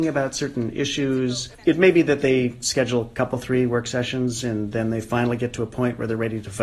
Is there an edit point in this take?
yes; 1 cut; at 1.5 s

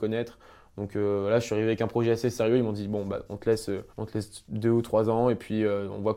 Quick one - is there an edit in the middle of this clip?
yes; 1 cut; at 3.9 s

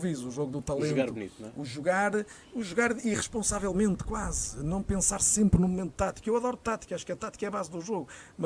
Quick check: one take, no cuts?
yes; 0 cuts

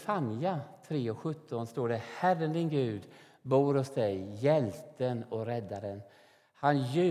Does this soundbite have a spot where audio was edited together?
no; 0 cuts

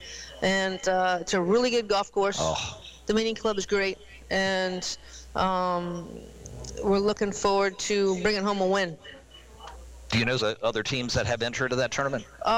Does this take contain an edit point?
yes; 3 cuts; at 1.3 s, 10.4 s, 11.7 s

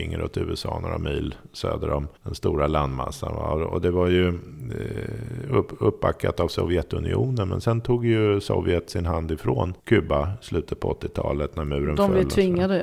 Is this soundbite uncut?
no; 2 cuts; at 2.2 s, 9.8 s

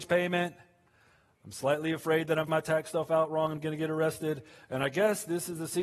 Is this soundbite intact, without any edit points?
no; 1 cut; at 2.5 s

